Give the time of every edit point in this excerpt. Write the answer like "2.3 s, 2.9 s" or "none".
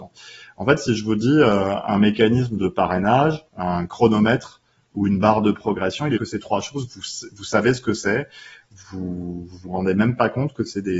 3.5 s, 6.2 s